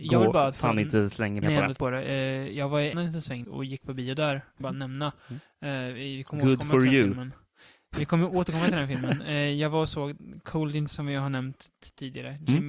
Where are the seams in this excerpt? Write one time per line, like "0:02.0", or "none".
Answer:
0:01.4
0:01.8
0:02.9
0:03.4
0:04.6
0:10.9